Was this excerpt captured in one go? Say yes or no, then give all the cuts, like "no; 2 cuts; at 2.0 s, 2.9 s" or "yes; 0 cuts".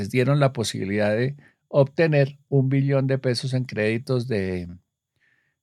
yes; 0 cuts